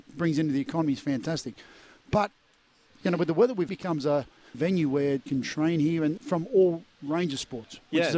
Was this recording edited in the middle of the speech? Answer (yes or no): yes